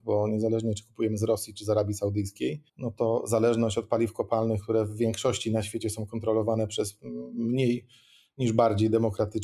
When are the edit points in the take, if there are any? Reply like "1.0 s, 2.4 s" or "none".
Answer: 2.7 s